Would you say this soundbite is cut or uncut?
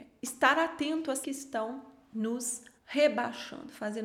cut